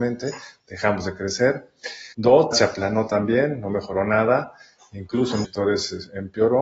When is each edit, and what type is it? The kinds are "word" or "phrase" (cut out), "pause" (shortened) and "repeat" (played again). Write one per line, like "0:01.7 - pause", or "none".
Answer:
0:02.1 - pause
0:02.5 - phrase
0:05.4 - word